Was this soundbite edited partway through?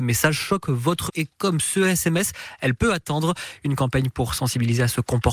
yes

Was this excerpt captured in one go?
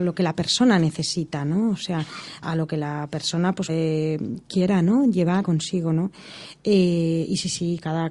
no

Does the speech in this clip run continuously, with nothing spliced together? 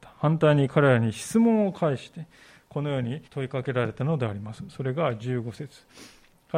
no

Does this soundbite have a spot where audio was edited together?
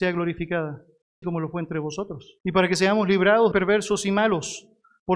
yes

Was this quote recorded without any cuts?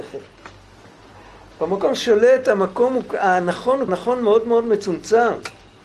no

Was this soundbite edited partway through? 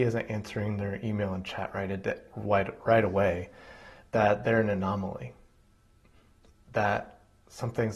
no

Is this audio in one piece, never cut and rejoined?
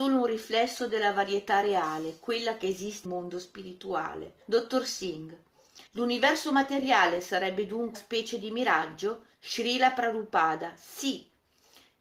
no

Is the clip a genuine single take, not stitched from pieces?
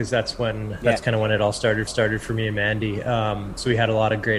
no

